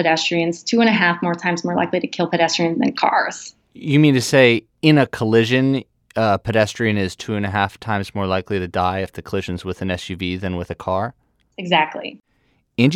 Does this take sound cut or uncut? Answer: uncut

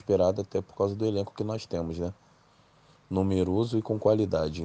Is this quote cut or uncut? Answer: uncut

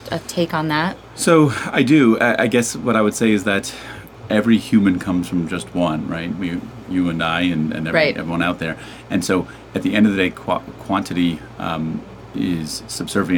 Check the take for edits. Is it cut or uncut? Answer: uncut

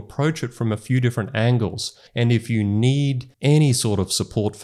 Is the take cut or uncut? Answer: cut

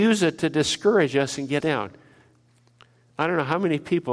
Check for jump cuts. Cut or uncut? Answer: cut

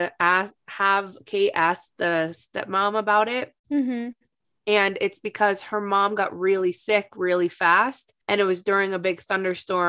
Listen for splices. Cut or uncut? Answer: cut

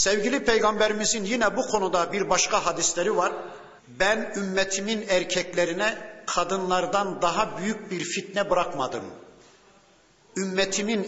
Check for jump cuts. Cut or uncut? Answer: cut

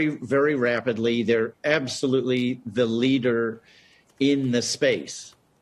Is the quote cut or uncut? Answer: uncut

